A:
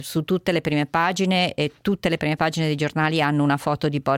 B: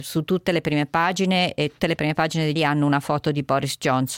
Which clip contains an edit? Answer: B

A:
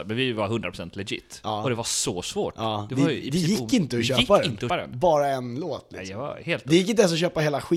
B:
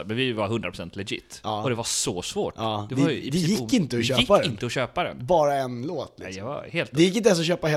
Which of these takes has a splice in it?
A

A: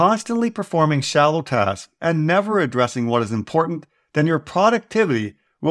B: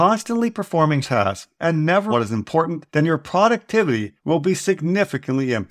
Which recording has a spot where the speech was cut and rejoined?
B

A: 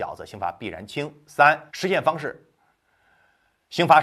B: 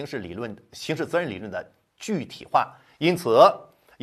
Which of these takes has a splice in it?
A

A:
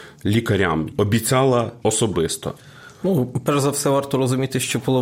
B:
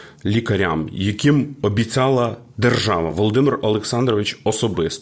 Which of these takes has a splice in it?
A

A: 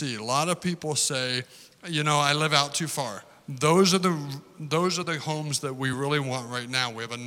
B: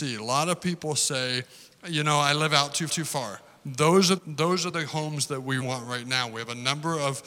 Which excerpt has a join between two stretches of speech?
B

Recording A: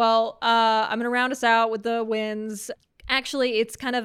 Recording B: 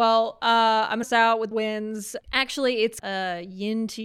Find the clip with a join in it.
B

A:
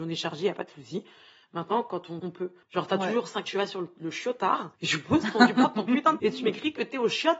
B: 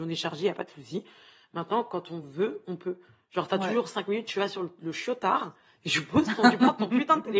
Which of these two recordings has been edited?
A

